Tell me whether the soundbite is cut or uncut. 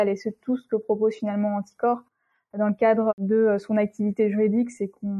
uncut